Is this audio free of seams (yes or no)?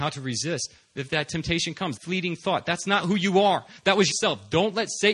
no